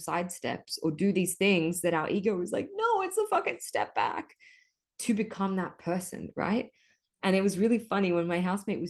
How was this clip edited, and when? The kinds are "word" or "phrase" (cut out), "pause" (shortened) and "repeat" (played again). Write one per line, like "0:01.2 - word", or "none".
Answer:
none